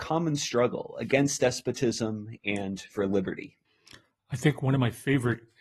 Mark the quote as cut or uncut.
uncut